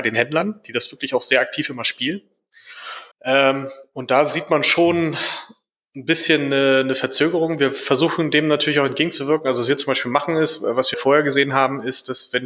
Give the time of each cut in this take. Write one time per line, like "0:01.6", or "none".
0:03.1
0:10.9